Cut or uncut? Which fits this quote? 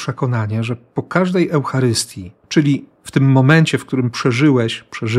cut